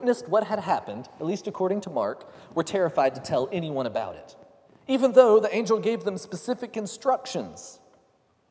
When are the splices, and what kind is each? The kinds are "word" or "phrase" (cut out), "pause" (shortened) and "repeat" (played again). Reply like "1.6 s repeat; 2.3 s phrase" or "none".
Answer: 4.7 s pause